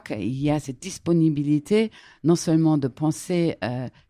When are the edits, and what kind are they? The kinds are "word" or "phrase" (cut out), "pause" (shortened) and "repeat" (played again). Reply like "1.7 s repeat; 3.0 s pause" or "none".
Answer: none